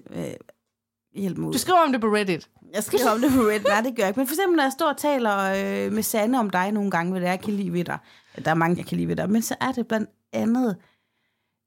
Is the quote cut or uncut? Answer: cut